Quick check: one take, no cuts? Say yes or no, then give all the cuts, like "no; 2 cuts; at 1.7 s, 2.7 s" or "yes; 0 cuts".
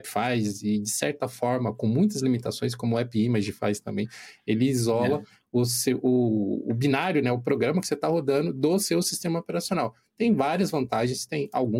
yes; 0 cuts